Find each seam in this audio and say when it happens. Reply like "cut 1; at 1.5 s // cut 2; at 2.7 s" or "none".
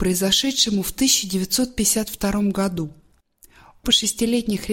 cut 1; at 3.8 s